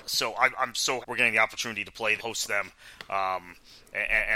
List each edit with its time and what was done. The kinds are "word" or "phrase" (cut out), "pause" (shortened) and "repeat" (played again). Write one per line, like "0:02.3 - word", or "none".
0:01.0 - word
0:02.2 - word